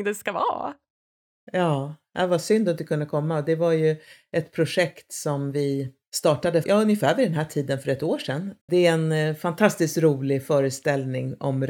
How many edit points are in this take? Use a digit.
2